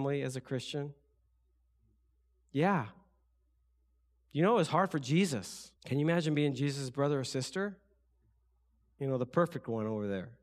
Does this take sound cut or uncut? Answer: cut